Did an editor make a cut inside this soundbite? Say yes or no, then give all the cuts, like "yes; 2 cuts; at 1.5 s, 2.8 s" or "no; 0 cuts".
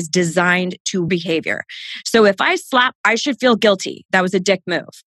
yes; 2 cuts; at 1.1 s, 3.0 s